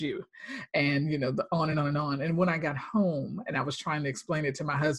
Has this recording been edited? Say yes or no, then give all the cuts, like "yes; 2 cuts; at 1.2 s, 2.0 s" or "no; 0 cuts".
no; 0 cuts